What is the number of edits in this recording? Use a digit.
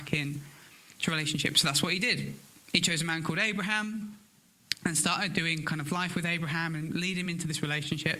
0